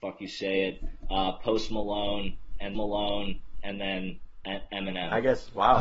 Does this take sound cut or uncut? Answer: cut